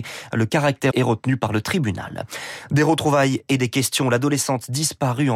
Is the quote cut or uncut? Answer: cut